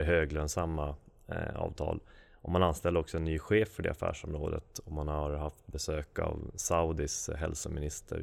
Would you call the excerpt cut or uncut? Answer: uncut